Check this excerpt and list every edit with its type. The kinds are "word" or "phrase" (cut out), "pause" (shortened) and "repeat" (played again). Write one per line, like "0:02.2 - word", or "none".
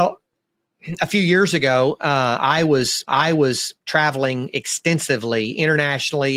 0:03.1 - repeat